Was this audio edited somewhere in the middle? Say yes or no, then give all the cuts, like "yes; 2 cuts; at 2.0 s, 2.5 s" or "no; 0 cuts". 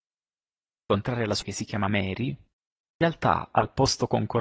yes; 1 cut; at 1.4 s